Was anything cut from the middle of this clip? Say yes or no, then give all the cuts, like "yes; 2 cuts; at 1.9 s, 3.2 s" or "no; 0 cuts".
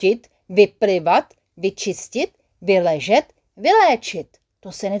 no; 0 cuts